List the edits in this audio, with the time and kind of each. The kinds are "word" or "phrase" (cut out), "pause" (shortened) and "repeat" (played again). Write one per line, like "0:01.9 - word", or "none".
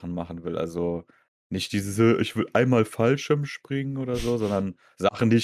none

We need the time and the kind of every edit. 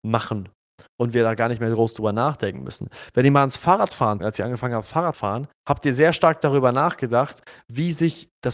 0:04.2 - word
0:05.1 - word
0:05.6 - pause

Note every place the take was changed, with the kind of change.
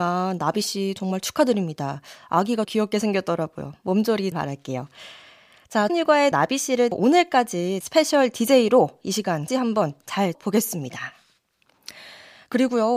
0:01.0 - word
0:02.6 - word
0:04.3 - word
0:05.9 - word
0:06.3 - word
0:06.9 - word
0:07.8 - word
0:09.5 - word
0:10.3 - word

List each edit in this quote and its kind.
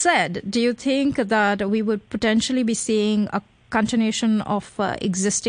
none

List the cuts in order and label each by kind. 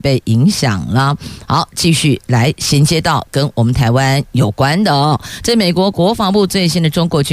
none

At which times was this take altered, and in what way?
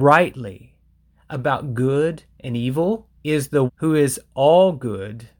0:03.2 - pause
0:03.7 - word

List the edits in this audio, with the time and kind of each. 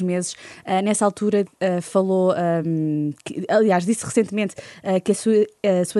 none

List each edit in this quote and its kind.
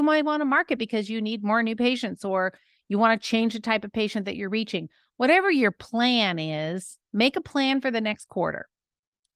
0:07.0 - pause

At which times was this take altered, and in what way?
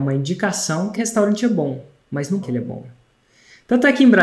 0:01.0 - word
0:02.4 - word

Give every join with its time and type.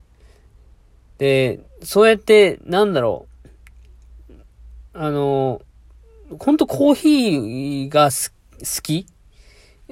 0:04.9 - pause

